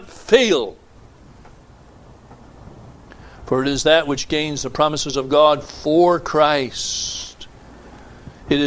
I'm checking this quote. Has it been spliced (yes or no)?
no